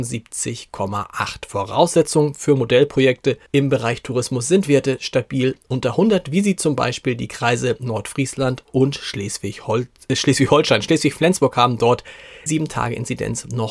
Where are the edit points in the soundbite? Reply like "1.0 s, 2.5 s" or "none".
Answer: 3.5 s, 12.5 s